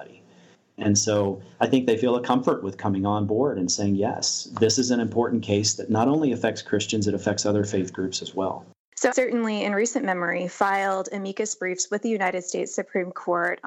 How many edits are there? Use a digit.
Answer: 2